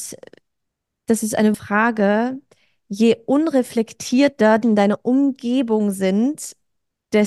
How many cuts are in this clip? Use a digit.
2